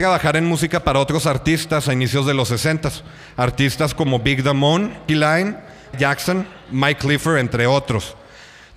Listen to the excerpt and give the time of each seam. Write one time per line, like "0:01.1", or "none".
0:05.1
0:05.9